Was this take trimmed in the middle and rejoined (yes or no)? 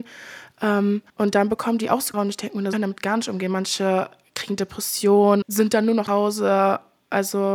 yes